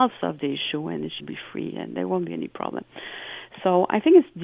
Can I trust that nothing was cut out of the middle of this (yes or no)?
no